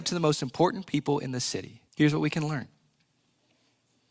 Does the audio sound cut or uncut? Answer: cut